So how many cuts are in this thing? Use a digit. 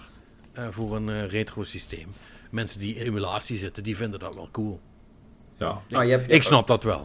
2